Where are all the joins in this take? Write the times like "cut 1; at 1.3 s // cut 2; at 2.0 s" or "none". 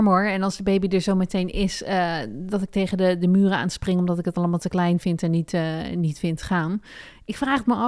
none